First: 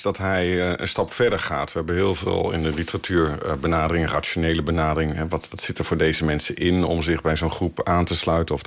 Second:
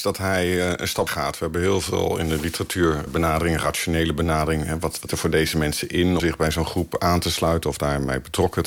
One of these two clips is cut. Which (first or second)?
second